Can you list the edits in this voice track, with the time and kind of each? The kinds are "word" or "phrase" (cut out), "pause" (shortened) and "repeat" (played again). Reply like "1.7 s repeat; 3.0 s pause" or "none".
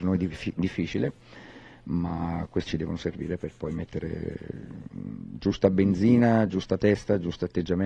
2.7 s word